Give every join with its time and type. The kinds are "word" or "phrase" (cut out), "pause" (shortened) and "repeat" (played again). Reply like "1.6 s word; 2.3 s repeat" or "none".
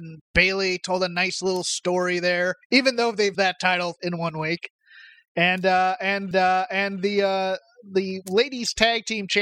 2.6 s pause; 3.3 s phrase; 4.0 s word; 6.3 s repeat